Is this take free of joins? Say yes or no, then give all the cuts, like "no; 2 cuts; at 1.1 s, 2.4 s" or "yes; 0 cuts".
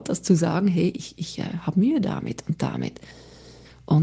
yes; 0 cuts